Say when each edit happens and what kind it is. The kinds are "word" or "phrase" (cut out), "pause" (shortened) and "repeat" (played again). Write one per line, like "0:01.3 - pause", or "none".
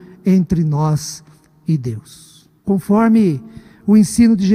0:02.6 - pause